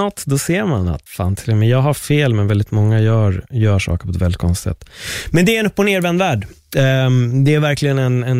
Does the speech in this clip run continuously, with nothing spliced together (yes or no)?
no